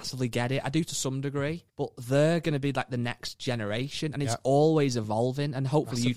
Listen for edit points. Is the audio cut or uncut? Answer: cut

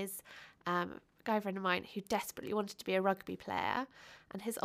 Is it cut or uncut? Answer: uncut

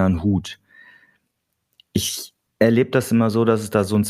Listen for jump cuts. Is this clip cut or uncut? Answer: uncut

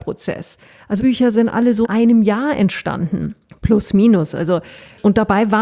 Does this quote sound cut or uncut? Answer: cut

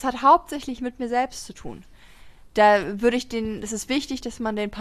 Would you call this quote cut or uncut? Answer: uncut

